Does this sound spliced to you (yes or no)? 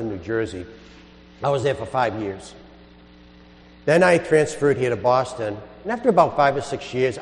no